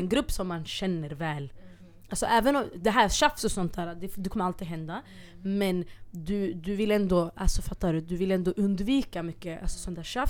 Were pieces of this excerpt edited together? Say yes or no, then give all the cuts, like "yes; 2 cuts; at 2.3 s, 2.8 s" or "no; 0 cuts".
no; 0 cuts